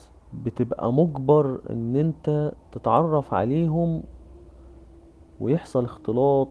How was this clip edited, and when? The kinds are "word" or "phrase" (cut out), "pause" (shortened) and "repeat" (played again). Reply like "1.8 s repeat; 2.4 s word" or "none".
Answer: none